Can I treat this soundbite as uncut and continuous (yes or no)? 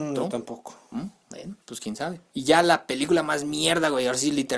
no